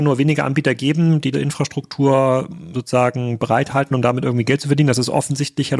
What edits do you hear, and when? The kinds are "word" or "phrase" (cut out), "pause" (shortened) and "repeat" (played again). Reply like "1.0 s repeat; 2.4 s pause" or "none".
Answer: 1.3 s word; 2.7 s word; 3.9 s word